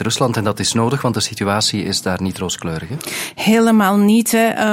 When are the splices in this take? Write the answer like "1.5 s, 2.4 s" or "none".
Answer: none